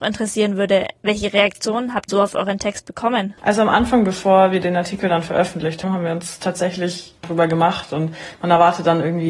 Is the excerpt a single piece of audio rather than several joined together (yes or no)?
no